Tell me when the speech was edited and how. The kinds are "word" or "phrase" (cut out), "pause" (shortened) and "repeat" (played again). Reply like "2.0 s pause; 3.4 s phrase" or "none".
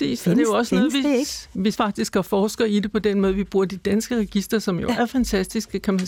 1.7 s word